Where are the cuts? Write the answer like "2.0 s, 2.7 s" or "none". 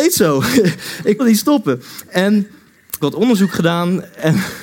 1.2 s, 3.0 s